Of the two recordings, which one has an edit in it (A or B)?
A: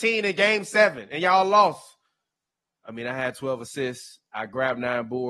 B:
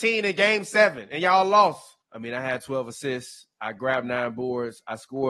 B